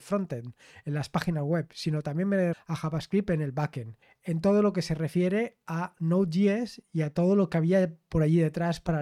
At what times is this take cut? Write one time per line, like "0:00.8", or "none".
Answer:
0:02.5
0:04.0